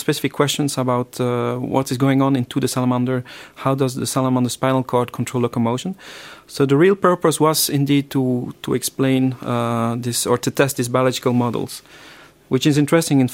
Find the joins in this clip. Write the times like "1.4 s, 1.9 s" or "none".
none